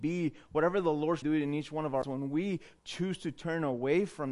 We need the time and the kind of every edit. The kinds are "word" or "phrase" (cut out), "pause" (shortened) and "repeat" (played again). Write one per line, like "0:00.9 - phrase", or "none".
0:01.2 - word
0:02.0 - word